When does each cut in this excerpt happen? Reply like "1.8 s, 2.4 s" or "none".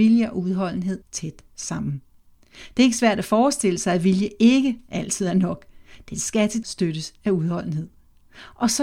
1.0 s, 6.6 s

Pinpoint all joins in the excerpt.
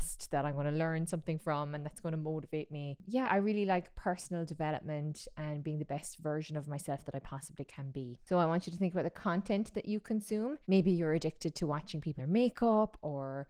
3.2 s, 10.6 s, 12.2 s

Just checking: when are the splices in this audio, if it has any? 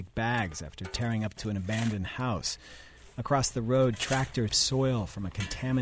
1.4 s, 4.5 s

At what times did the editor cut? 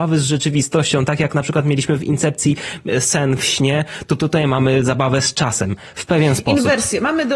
none

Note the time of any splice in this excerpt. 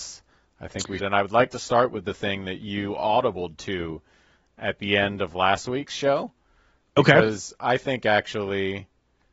1.0 s

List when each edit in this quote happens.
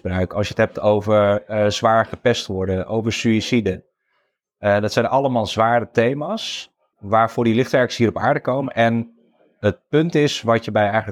6.9 s

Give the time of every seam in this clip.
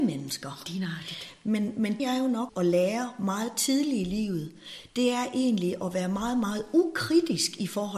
2.0 s, 2.5 s

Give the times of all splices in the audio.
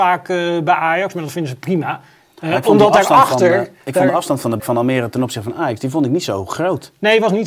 4.6 s

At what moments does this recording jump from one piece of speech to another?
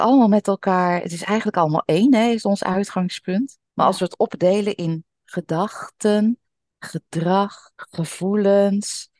3.7 s, 7.7 s

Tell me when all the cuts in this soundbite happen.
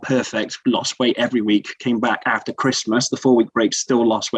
none

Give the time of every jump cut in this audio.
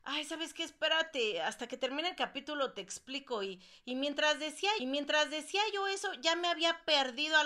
4.8 s

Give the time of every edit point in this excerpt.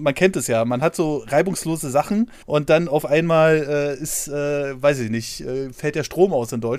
2.4 s

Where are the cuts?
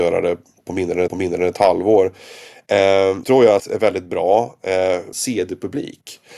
1.1 s, 3.2 s, 3.6 s, 5.1 s

